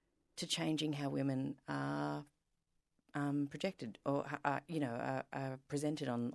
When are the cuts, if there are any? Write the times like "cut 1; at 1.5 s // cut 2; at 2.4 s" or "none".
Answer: none